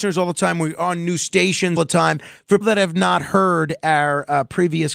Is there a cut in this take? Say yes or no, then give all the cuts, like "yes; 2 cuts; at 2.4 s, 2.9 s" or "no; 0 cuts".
yes; 2 cuts; at 1.8 s, 2.6 s